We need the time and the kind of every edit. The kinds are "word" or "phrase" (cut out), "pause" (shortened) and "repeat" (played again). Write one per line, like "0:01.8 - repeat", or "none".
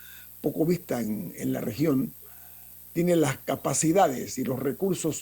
none